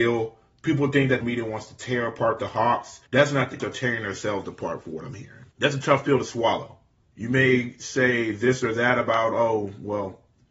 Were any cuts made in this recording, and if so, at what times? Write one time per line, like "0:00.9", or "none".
0:01.2
0:03.1
0:03.6
0:05.5
0:07.0